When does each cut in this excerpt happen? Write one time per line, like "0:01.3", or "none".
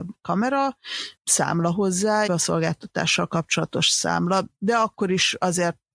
0:01.2
0:02.3